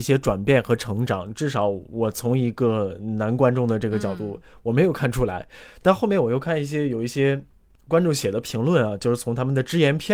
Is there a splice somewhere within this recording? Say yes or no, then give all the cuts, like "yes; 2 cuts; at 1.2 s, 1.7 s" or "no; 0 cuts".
no; 0 cuts